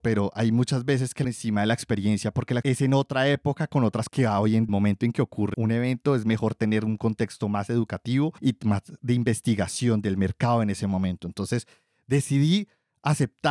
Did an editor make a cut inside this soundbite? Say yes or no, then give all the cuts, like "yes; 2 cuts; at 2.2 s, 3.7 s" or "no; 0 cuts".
yes; 6 cuts; at 1.2 s, 2.6 s, 4.1 s, 4.7 s, 5.5 s, 8.4 s